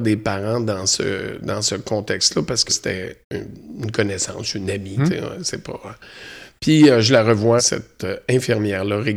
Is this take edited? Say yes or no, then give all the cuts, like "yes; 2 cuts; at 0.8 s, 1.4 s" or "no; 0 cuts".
yes; 4 cuts; at 2.7 s, 3.2 s, 5.0 s, 7.6 s